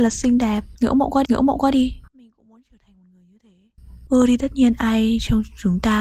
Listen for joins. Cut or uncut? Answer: cut